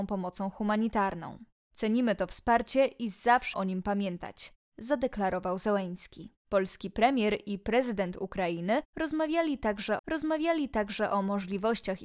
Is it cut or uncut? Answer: cut